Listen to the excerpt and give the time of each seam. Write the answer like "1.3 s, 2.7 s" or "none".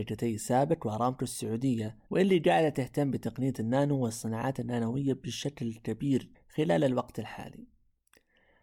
2.1 s, 6.3 s